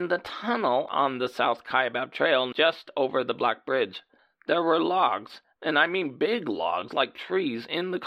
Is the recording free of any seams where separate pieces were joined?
yes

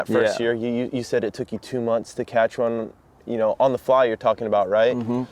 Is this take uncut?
yes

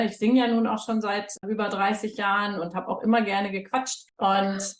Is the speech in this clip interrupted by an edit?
no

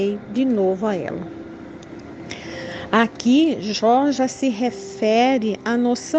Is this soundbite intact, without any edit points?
yes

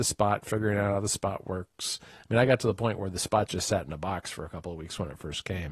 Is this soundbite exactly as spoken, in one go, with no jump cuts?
yes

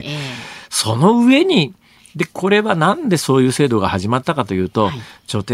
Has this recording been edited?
no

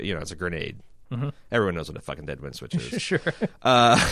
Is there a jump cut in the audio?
no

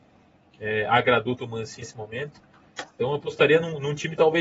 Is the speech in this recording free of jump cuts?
no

